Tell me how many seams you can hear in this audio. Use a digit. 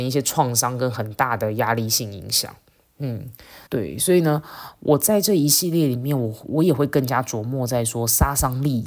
1